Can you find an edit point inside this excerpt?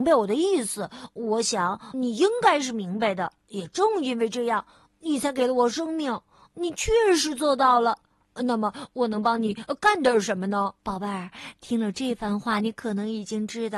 yes; 3 cuts; at 1.9 s, 3.4 s, 10.8 s

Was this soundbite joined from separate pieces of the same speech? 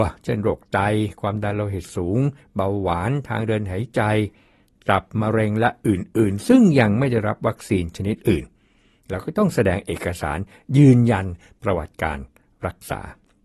no; 0 cuts

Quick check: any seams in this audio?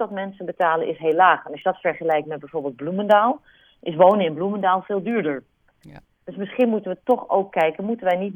no; 0 cuts

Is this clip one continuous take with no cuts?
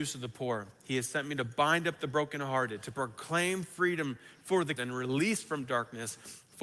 no; 1 cut; at 4.8 s

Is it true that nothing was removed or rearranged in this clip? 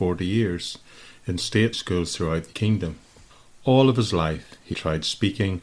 no; 5 cuts; at 1.4 s, 1.7 s, 2.5 s, 3.3 s, 4.7 s

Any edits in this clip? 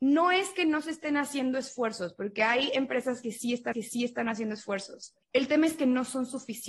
yes; 2 cuts; at 3.7 s, 5.2 s

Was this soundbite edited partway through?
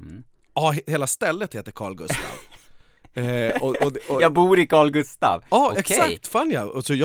no; 0 cuts

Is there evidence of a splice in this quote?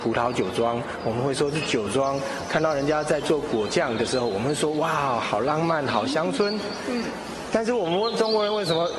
no; 0 cuts

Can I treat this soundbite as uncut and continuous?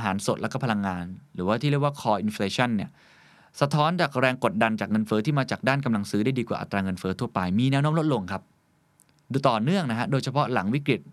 yes; 0 cuts

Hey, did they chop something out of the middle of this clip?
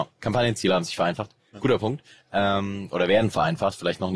no; 0 cuts

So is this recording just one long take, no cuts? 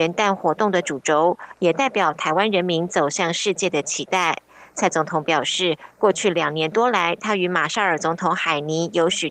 yes; 0 cuts

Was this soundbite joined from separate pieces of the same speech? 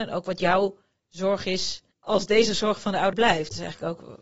yes; 2 cuts; at 1.9 s, 3.1 s

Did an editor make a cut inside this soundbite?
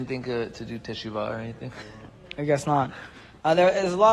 yes; 1 cut; at 2.4 s

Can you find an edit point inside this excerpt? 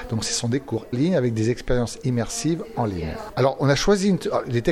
yes; 1 cut; at 0.9 s

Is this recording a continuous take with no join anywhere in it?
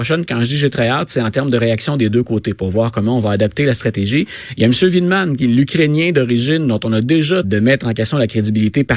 no; 1 cut; at 7.4 s

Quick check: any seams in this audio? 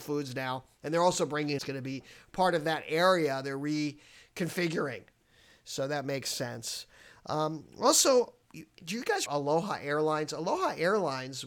yes; 3 cuts; at 1.6 s, 8.4 s, 9.3 s

